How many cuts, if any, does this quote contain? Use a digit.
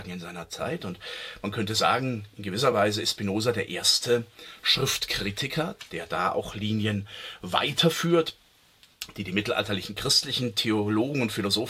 0